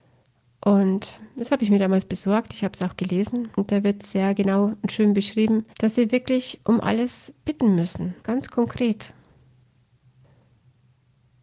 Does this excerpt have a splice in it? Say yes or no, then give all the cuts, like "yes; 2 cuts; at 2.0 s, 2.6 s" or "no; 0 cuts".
yes; 5 cuts; at 3.5 s, 5.7 s, 6.6 s, 7.4 s, 8.2 s